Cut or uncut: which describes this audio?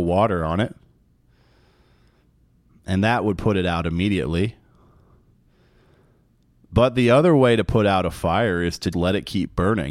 cut